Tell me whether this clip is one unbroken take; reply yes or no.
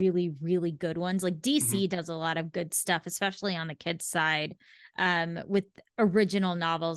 yes